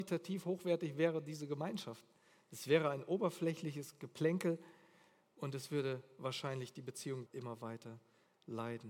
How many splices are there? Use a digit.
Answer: 1